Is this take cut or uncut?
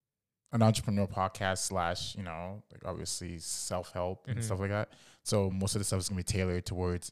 uncut